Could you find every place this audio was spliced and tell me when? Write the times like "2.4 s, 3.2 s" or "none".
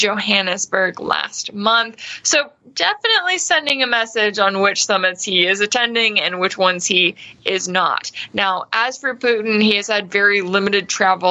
none

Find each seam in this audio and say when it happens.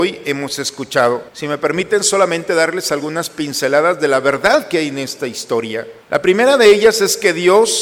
1.3 s, 6.0 s

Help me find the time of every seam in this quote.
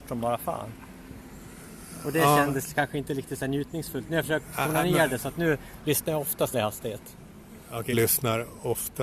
6.5 s, 7.9 s

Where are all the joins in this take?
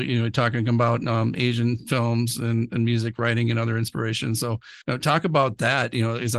4.8 s

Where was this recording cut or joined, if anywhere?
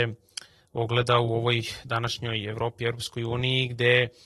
none

